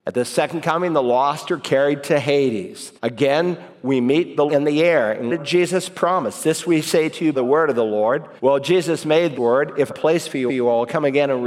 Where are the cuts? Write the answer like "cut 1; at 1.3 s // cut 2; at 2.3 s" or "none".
cut 1; at 3.0 s // cut 2; at 4.5 s // cut 3; at 5.3 s // cut 4; at 7.3 s // cut 5; at 8.4 s // cut 6; at 9.4 s // cut 7; at 9.9 s // cut 8; at 10.5 s